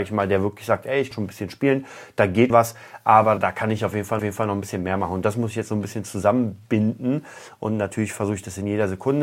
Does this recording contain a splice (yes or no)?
yes